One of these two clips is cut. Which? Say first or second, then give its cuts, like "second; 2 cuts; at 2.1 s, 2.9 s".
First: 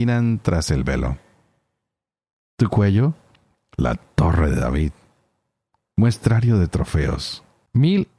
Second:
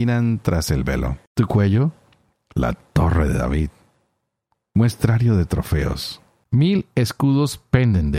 second; 1 cut; at 1.3 s